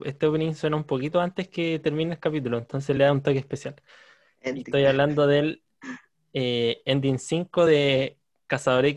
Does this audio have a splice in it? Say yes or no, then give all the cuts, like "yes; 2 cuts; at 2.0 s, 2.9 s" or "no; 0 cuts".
no; 0 cuts